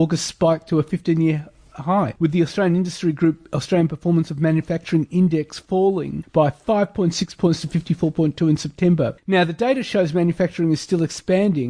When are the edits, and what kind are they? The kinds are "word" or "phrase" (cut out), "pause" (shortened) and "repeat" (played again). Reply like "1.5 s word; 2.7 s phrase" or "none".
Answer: none